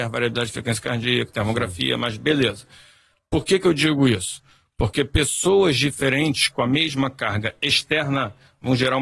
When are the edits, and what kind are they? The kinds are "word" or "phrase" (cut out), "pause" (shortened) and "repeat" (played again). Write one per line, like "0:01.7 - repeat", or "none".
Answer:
none